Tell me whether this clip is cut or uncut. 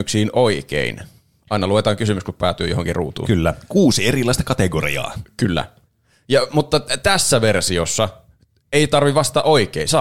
uncut